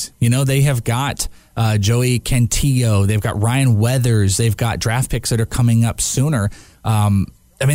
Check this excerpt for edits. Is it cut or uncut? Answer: uncut